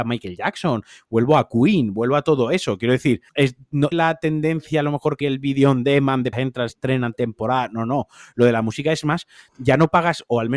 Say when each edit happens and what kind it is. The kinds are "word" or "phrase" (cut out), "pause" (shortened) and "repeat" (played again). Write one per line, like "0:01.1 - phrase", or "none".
0:03.3 - pause
0:03.9 - phrase
0:05.2 - word
0:06.3 - word
0:06.7 - word